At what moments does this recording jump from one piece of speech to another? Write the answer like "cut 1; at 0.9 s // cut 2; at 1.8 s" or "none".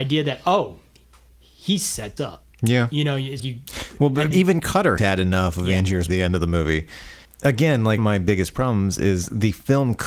cut 1; at 2.2 s // cut 2; at 2.5 s // cut 3; at 3.4 s // cut 4; at 4.3 s // cut 5; at 5.0 s // cut 6; at 6.1 s // cut 7; at 7.2 s // cut 8; at 8.0 s